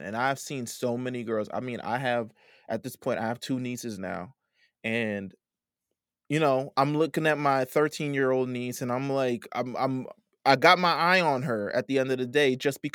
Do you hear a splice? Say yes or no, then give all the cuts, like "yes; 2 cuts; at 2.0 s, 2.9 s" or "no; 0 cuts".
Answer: no; 0 cuts